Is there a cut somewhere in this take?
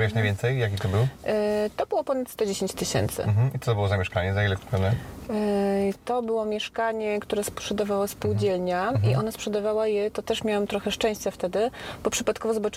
no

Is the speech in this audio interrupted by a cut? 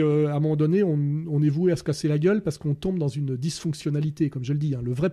no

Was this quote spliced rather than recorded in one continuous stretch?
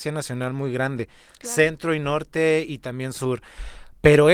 no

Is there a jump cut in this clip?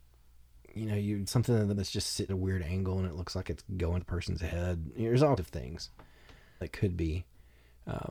yes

